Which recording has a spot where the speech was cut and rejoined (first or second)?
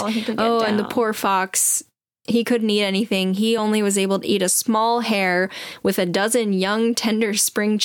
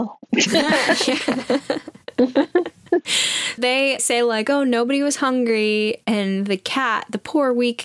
second